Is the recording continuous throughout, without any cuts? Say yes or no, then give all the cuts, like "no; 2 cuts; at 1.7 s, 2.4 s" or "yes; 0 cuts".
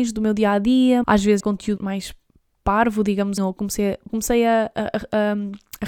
no; 5 cuts; at 1.0 s, 1.4 s, 1.8 s, 3.4 s, 4.1 s